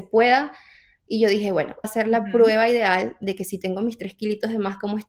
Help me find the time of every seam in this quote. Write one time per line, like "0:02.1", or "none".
0:01.8